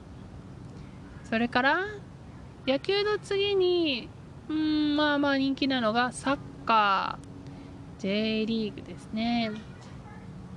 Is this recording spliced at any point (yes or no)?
no